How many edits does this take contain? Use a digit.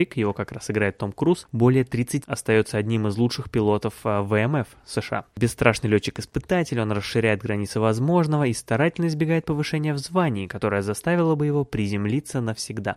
1